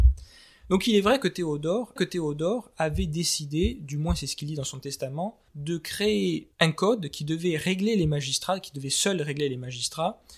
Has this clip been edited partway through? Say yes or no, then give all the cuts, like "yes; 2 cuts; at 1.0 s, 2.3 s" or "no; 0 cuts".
yes; 3 cuts; at 2.0 s, 5.5 s, 6.5 s